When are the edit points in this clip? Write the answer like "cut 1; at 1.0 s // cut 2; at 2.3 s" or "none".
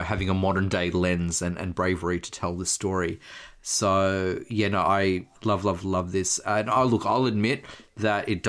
none